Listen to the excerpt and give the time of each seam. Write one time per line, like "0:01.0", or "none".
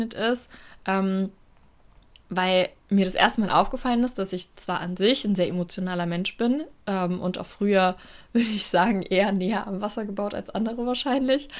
0:02.8